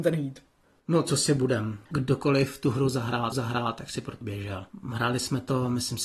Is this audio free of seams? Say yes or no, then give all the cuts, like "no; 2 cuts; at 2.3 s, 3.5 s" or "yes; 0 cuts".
no; 3 cuts; at 1.9 s, 3.3 s, 4.2 s